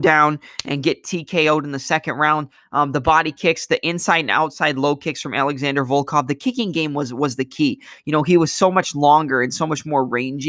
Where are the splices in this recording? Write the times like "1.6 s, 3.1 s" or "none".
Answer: none